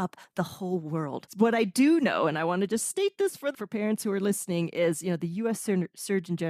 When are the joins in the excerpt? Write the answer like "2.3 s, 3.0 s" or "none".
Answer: 3.5 s

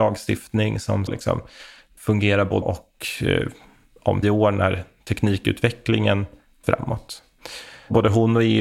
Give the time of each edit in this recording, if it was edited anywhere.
1.1 s, 2.0 s, 2.6 s, 4.2 s, 6.6 s

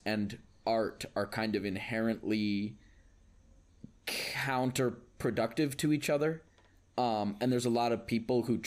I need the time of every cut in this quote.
none

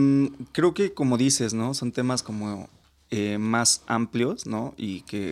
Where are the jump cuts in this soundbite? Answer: none

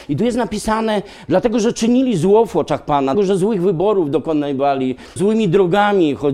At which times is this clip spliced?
3.1 s, 5.2 s

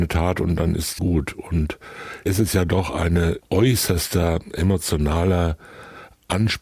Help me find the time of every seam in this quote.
1.0 s, 2.3 s, 3.4 s

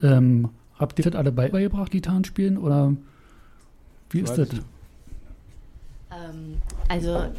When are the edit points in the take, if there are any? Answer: 1.0 s, 1.5 s, 1.9 s

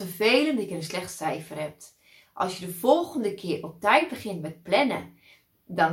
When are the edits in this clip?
none

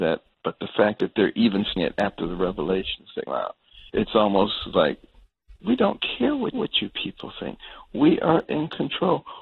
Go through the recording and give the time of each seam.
1.8 s, 3.3 s, 3.9 s, 5.6 s, 6.5 s

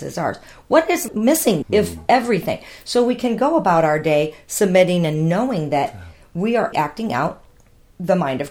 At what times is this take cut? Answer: 1.1 s, 1.6 s, 6.7 s

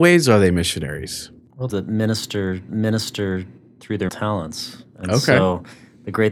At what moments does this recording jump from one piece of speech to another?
1.7 s, 2.7 s, 4.1 s

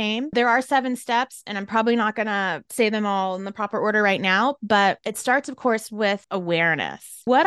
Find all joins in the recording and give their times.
none

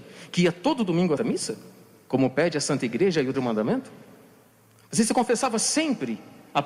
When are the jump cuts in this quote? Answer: 1.2 s, 3.3 s

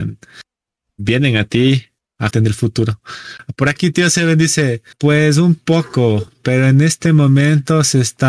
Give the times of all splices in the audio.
2.3 s, 4.9 s

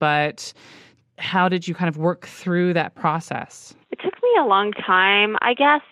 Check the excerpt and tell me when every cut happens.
3.8 s

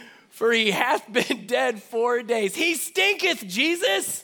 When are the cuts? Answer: none

